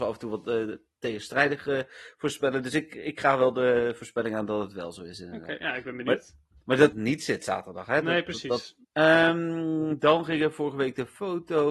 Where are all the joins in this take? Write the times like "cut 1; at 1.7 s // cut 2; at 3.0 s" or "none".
cut 1; at 6.9 s // cut 2; at 8.8 s